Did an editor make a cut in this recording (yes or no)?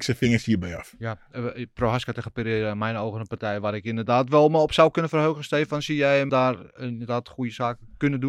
yes